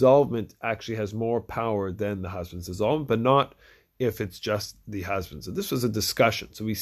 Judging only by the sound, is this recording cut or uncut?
uncut